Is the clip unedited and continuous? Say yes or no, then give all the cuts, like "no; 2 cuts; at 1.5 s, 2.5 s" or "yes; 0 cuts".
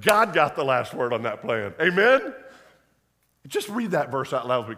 yes; 0 cuts